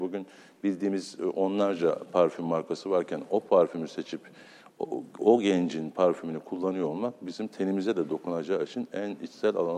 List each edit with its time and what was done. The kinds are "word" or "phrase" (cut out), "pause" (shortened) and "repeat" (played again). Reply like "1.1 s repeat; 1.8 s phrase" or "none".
none